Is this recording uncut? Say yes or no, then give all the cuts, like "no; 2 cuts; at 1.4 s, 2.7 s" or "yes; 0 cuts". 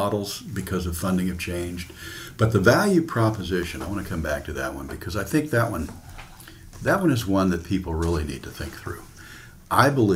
yes; 0 cuts